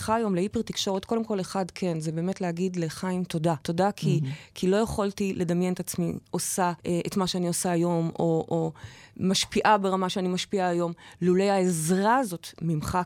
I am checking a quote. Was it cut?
yes; 2 cuts; at 3.6 s, 6.8 s

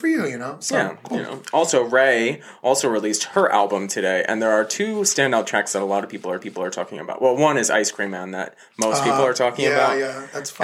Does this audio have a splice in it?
yes; 1 cut; at 6.4 s

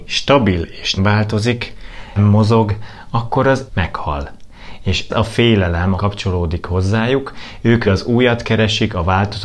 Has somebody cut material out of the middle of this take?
yes; 6 cuts; at 1.0 s, 2.2 s, 3.7 s, 5.1 s, 6.0 s, 7.8 s

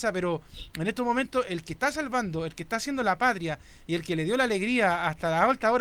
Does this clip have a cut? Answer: no; 0 cuts

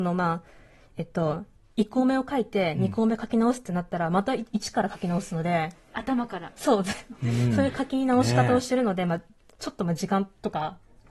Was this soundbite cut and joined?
no; 0 cuts

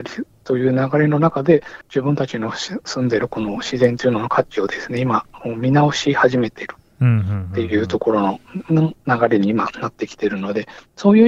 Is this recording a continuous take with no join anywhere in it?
no; 2 cuts; at 1.8 s, 9.0 s

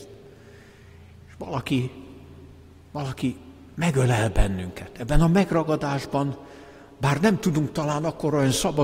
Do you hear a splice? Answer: no; 0 cuts

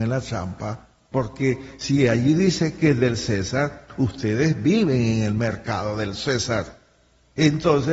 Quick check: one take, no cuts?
yes; 0 cuts

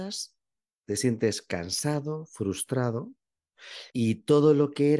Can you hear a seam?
yes; 1 cut; at 3.9 s

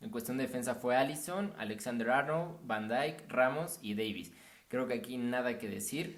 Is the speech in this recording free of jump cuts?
yes; 0 cuts

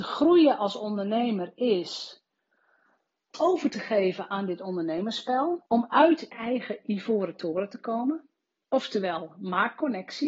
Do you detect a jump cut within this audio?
yes; 3 cuts; at 3.3 s, 5.7 s, 6.3 s

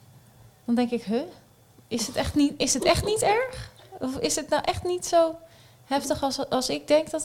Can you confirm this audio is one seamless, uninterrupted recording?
yes; 0 cuts

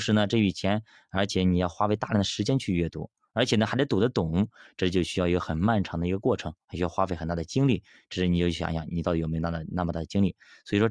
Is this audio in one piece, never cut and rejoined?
yes; 0 cuts

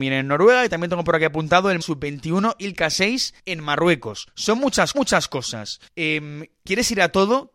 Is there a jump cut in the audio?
yes; 2 cuts; at 1.8 s, 4.9 s

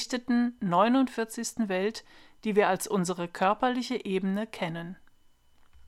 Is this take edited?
no; 0 cuts

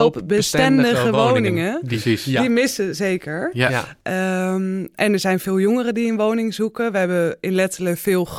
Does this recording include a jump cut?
no; 0 cuts

